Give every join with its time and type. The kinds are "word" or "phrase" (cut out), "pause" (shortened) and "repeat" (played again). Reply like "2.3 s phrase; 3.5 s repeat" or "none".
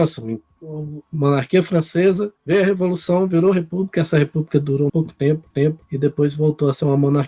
2.4 s pause; 4.9 s word; 5.5 s repeat